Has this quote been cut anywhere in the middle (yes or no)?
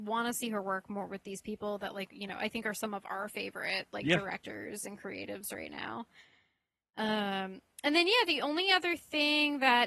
no